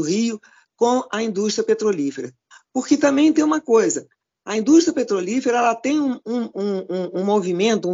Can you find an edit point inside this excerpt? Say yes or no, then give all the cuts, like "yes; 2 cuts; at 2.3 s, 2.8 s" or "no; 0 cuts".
no; 0 cuts